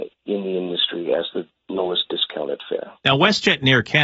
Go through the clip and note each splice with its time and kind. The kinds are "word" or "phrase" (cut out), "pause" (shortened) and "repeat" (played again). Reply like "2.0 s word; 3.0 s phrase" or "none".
3.0 s pause